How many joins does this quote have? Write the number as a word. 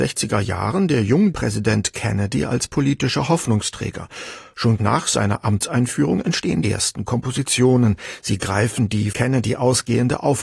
four